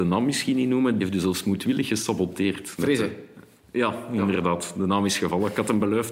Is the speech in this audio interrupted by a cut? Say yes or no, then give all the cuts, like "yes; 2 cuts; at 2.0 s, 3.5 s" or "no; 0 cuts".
no; 0 cuts